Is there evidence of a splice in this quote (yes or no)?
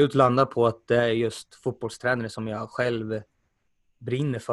no